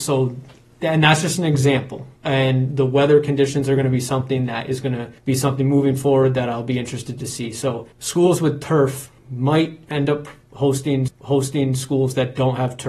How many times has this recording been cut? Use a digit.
5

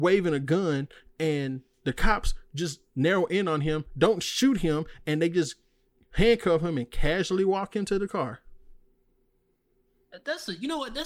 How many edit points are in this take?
0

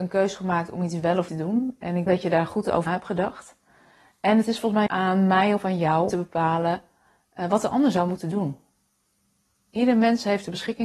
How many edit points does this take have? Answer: 5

